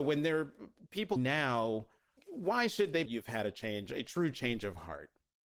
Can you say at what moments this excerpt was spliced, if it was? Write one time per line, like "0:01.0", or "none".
0:01.2
0:02.2
0:03.1